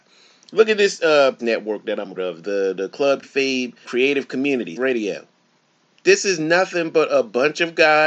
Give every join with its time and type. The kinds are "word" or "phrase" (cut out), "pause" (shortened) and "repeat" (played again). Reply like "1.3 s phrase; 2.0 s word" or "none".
1.4 s word; 2.2 s word; 3.2 s word; 3.8 s word; 4.8 s word